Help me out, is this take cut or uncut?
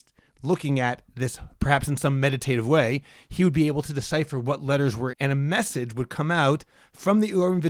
cut